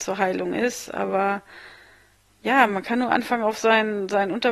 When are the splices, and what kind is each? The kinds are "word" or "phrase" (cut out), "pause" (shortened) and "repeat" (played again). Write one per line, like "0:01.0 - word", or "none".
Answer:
none

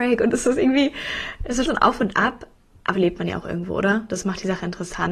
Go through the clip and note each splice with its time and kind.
0:01.7 - word
0:02.9 - word

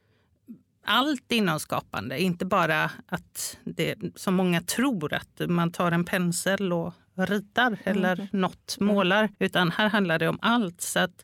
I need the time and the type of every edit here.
0:09.3 - pause

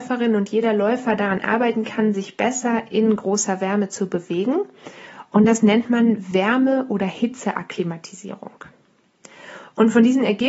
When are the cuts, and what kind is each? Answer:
none

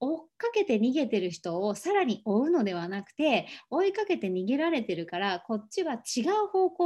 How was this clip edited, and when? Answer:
none

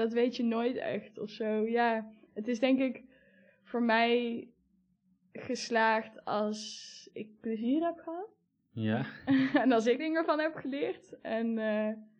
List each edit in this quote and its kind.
0:10.0 - word

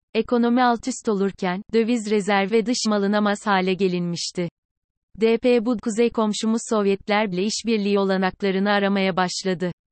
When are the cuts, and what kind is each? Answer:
0:02.5 - word
0:02.9 - word
0:05.8 - word
0:07.3 - word

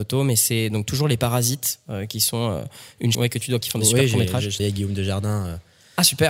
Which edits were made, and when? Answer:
0:03.1 - word
0:03.6 - word
0:04.6 - word

